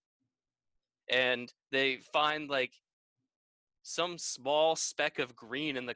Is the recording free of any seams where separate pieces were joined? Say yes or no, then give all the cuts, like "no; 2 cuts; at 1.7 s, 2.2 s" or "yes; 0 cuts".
yes; 0 cuts